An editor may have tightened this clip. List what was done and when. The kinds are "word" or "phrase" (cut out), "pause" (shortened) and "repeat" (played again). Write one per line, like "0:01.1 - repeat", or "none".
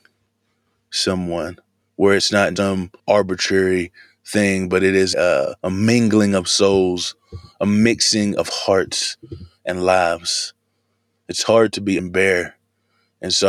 0:01.8 - pause
0:02.6 - word
0:03.0 - pause
0:05.1 - word
0:05.6 - pause
0:12.0 - word